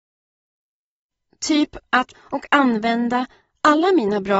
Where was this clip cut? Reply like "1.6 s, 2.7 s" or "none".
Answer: 2.1 s

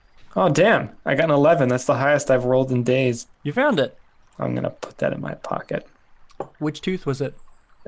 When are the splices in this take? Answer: none

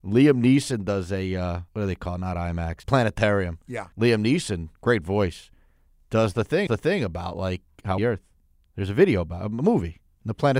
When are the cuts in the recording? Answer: 1.7 s, 2.8 s, 3.9 s, 4.7 s, 6.7 s, 8.0 s

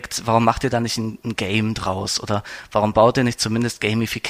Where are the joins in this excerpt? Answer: none

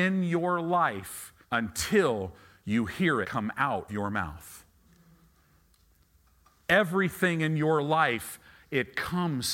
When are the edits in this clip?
1.4 s, 3.2 s, 3.9 s

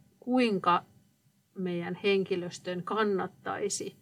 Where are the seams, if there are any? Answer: none

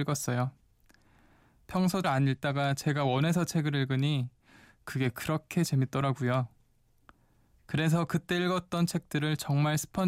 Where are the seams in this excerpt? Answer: 2.0 s

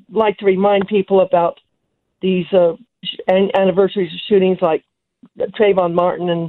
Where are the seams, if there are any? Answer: none

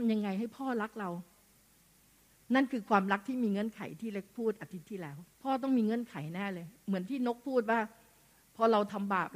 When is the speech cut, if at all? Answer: 5.3 s

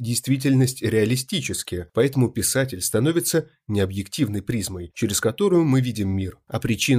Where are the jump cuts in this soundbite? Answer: none

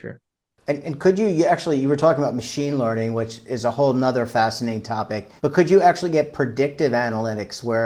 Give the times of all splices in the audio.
5.4 s

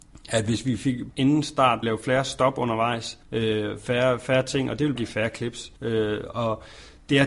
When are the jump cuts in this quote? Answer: 1.1 s, 1.8 s, 3.2 s, 5.0 s, 5.8 s

